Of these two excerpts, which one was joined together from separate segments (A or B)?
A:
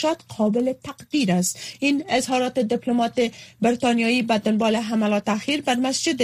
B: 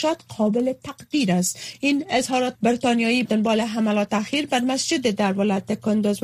B